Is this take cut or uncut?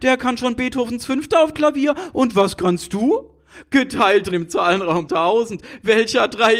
cut